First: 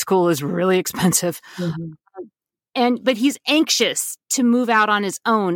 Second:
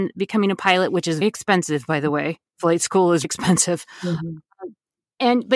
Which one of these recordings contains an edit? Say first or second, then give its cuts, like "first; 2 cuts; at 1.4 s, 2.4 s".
second; 2 cuts; at 1.2 s, 3.2 s